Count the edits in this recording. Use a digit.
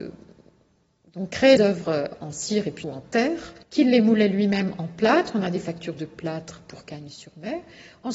3